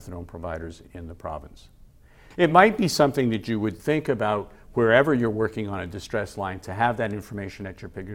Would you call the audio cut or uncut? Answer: uncut